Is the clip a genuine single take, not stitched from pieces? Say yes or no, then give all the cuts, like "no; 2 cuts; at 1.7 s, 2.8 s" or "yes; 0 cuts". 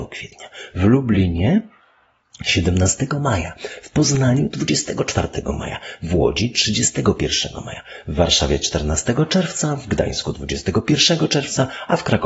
yes; 0 cuts